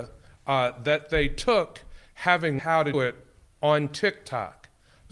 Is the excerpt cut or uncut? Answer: cut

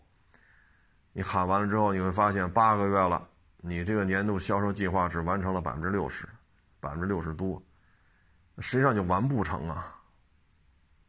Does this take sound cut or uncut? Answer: uncut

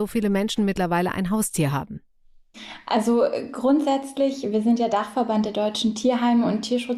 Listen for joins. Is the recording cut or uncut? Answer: uncut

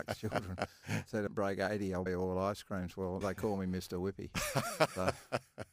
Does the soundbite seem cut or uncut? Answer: cut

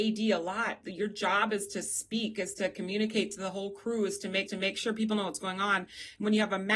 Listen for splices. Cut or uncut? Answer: cut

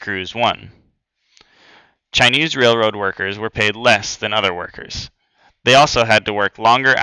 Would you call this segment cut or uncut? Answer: uncut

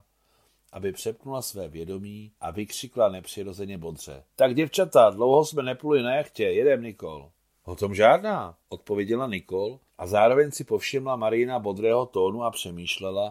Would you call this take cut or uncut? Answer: cut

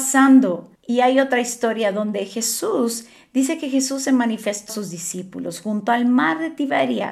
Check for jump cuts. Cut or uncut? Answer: cut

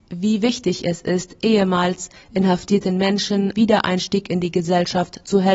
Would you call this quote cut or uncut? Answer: cut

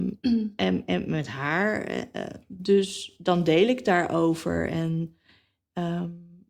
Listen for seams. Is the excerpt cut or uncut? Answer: uncut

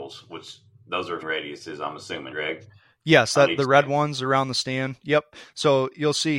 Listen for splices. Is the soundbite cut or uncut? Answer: cut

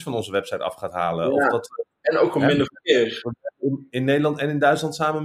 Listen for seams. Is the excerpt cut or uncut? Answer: uncut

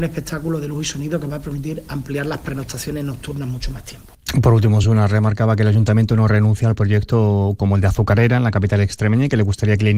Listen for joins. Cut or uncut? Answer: uncut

